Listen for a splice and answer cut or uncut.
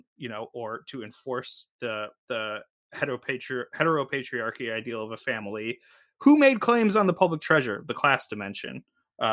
uncut